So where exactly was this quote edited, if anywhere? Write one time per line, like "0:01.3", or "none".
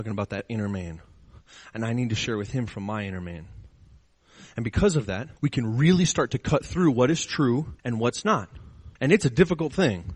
0:05.4
0:07.8
0:09.0